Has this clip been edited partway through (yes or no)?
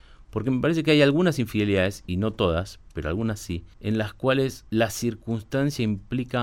yes